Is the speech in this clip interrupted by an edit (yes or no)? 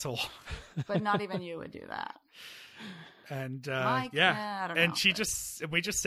no